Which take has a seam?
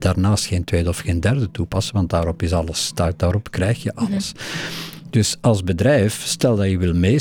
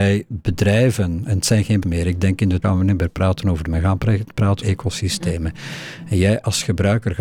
second; 4 cuts; at 1.8 s, 2.6 s, 3.6 s, 4.6 s

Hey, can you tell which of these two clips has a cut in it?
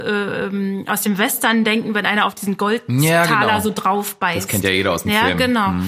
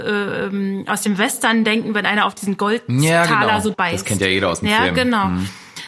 second; 1 cut; at 3.7 s

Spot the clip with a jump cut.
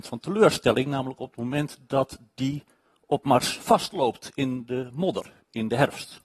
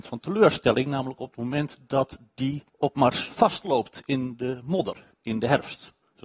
second; 1 cut; at 2.7 s

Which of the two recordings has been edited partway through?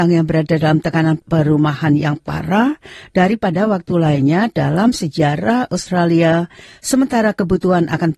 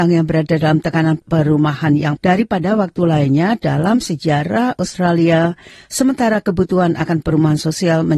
second; 1 cut; at 2.2 s

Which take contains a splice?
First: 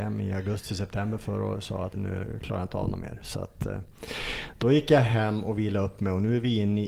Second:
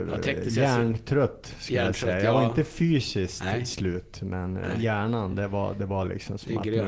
first; 1 cut; at 1.9 s

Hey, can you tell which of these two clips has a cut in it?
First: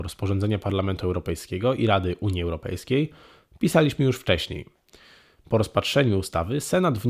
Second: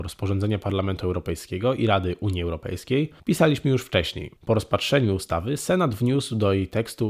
second; 2 cuts; at 3.2 s, 4.4 s

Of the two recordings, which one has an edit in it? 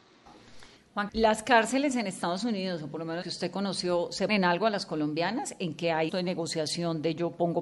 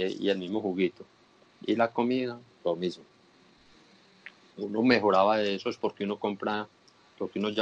first; 4 cuts; at 1.1 s, 3.2 s, 4.3 s, 6.1 s

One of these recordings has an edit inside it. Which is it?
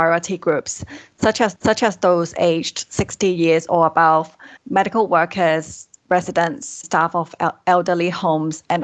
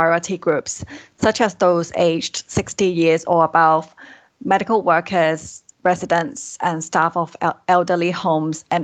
first; 3 cuts; at 1.6 s, 4.6 s, 6.8 s

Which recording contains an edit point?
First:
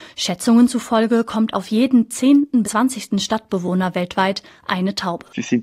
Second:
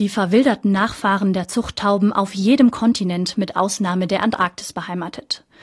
first; 1 cut; at 2.6 s

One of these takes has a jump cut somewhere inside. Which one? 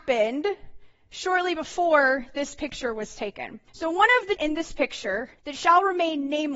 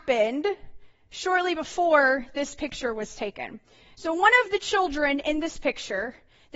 first; 3 cuts; at 3.7 s, 4.4 s, 5.4 s

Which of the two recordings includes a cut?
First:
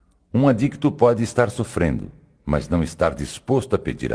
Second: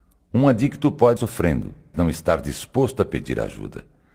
second; 2 cuts; at 1.2 s, 1.9 s

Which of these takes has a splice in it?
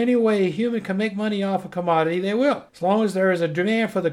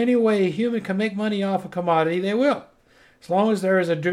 first; 1 cut; at 2.7 s

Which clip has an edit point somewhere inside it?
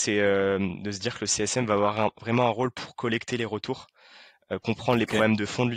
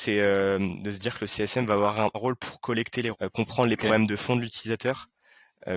second; 2 cuts; at 2.1 s, 3.1 s

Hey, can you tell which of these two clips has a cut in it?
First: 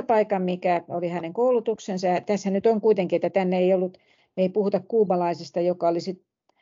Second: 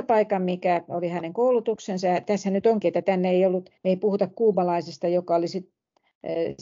second; 2 cuts; at 2.8 s, 3.8 s

